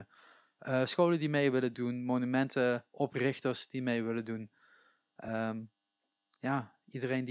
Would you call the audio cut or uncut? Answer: uncut